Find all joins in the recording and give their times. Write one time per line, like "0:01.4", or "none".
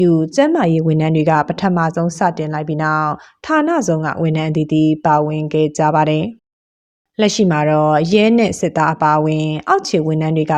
0:06.4